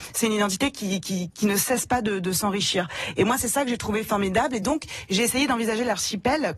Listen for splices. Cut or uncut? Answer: uncut